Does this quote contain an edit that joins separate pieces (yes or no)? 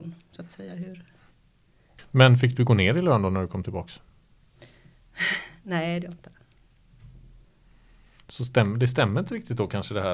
yes